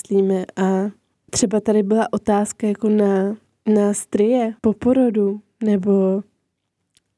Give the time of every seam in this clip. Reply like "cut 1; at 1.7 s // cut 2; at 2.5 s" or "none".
cut 1; at 1.1 s // cut 2; at 4.6 s